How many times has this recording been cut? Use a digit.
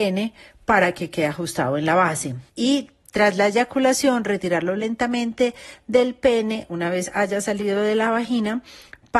1